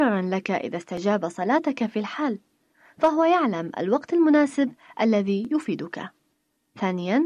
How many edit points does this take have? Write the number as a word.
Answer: zero